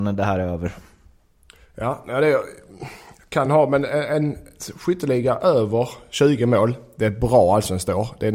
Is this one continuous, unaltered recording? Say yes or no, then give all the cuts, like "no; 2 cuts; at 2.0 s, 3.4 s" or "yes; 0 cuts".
yes; 0 cuts